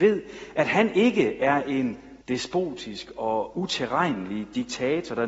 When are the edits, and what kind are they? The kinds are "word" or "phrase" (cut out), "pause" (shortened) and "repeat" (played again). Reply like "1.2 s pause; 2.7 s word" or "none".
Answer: 2.2 s pause